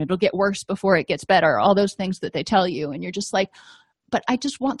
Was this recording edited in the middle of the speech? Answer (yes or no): no